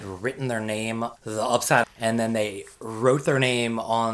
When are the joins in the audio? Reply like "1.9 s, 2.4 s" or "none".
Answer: 1.2 s, 1.8 s